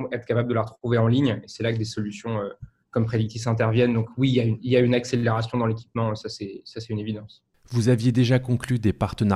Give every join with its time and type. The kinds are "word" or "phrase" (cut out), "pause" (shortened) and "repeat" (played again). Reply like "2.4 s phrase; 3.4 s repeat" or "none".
none